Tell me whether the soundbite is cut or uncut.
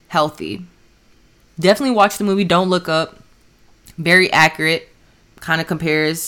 uncut